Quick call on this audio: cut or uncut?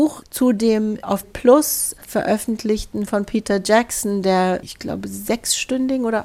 cut